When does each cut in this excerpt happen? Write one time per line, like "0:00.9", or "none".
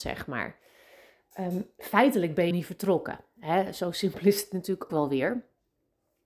0:02.5
0:04.9